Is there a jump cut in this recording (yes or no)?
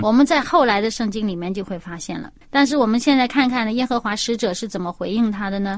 yes